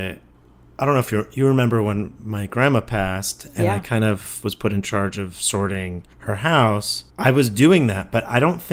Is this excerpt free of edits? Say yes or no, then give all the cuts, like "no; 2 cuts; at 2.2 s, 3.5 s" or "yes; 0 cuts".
no; 2 cuts; at 6.1 s, 7.1 s